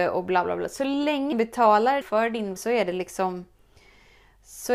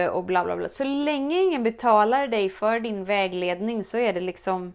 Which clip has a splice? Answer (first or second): first